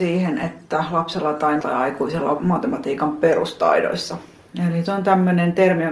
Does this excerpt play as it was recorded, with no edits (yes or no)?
no